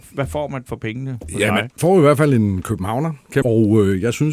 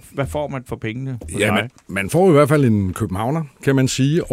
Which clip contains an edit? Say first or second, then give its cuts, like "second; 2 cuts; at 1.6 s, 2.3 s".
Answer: first; 2 cuts; at 1.8 s, 3.4 s